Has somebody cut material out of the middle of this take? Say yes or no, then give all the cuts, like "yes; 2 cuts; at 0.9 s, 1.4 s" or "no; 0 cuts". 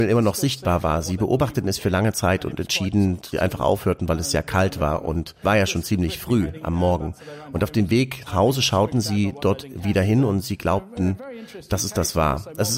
yes; 3 cuts; at 3.3 s, 5.4 s, 8.3 s